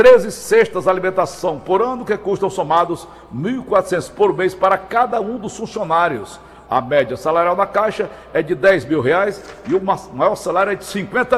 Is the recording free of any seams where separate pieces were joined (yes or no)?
yes